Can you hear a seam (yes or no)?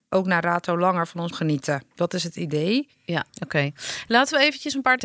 yes